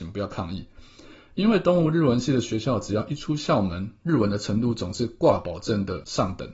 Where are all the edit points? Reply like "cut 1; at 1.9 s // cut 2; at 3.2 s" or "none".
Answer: none